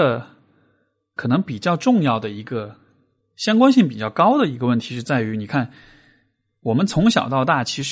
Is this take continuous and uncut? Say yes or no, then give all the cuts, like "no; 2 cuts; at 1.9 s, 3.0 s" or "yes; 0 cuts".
yes; 0 cuts